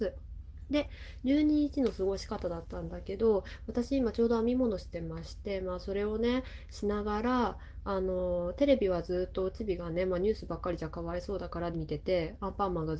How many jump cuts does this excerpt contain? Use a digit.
1